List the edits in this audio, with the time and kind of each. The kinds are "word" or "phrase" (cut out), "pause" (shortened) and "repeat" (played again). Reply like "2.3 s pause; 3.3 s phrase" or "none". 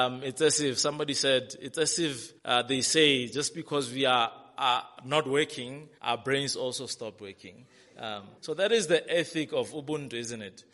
2.4 s pause; 6.0 s pause; 8.4 s pause